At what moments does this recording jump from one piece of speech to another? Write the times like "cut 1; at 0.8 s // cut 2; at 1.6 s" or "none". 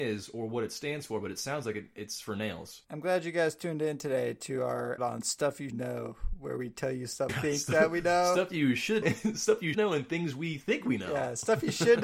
cut 1; at 5.0 s // cut 2; at 5.7 s // cut 3; at 7.3 s // cut 4; at 9.0 s // cut 5; at 9.7 s